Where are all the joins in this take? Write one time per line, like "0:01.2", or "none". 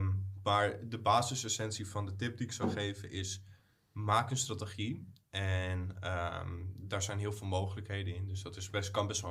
none